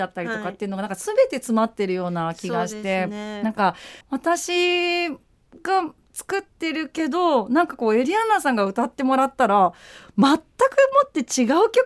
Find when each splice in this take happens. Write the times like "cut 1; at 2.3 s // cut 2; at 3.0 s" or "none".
cut 1; at 4.0 s // cut 2; at 6.5 s